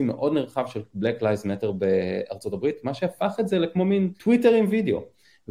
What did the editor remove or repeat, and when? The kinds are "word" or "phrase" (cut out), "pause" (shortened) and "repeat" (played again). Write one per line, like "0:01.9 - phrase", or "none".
0:04.2 - pause